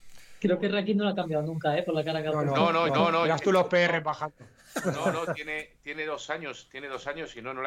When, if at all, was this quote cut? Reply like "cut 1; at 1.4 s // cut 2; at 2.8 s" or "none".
cut 1; at 2.9 s